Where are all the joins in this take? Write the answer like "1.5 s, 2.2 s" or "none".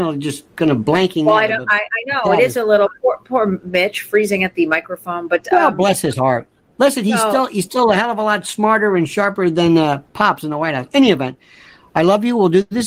none